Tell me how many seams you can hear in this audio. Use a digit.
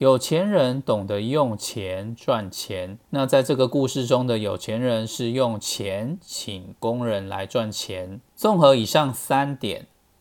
2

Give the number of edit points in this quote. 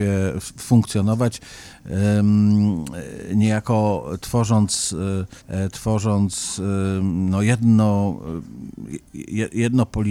1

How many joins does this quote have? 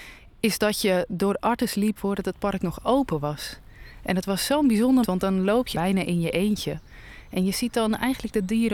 3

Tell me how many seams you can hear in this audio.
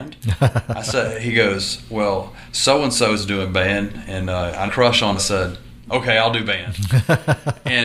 3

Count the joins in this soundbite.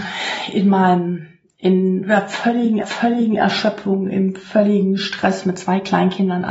1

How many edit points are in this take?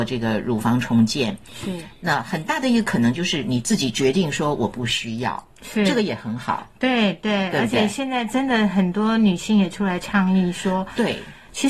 0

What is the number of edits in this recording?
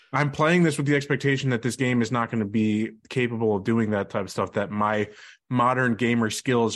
0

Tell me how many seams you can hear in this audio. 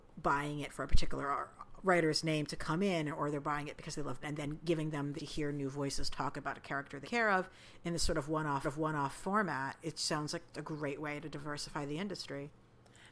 5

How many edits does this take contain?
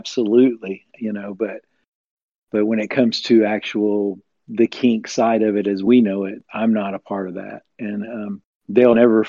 0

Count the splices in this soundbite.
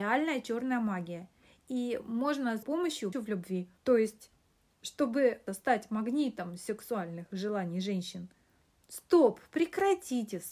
4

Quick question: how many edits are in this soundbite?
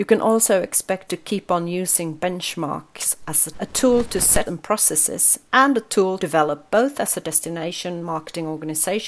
5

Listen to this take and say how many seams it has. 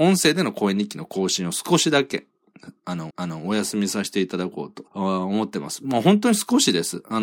2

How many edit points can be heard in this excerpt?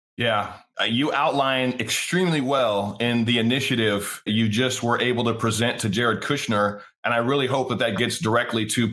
1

